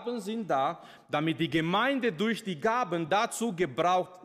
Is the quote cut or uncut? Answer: uncut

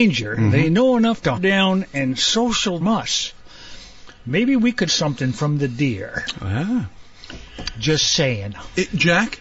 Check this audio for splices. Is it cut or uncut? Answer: cut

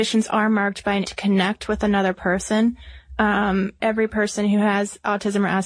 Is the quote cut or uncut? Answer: cut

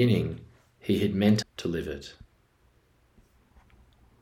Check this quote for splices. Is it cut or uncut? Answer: cut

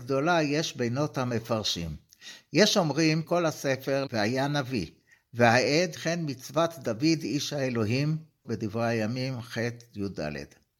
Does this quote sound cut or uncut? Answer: cut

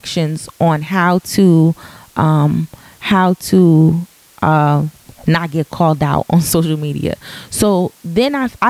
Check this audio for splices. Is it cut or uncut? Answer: uncut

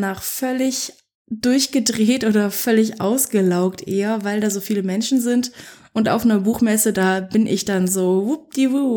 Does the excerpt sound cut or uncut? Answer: uncut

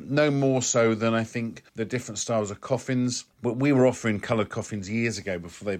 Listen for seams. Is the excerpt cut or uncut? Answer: cut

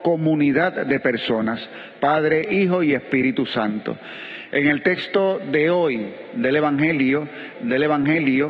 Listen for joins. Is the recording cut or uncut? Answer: cut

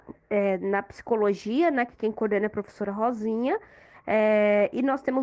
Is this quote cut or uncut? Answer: uncut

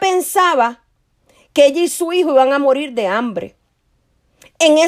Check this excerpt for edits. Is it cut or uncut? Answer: uncut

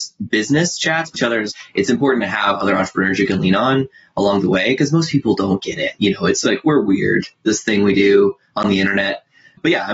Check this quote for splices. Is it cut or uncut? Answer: cut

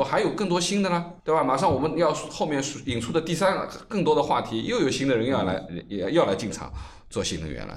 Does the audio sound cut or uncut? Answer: cut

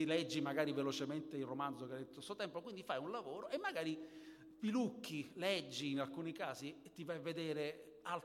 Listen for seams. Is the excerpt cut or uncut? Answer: uncut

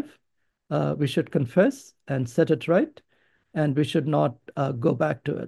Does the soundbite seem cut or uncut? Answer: uncut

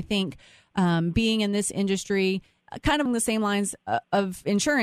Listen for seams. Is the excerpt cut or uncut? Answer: cut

